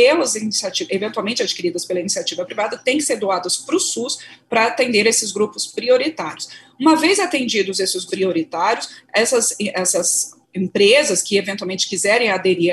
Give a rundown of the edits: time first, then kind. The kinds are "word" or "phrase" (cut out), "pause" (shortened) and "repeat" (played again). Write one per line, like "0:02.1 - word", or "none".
0:08.1 - word
0:10.4 - pause